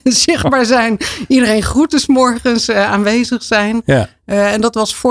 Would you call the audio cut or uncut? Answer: uncut